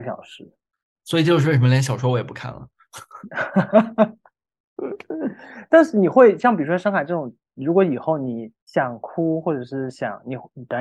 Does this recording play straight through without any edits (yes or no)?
no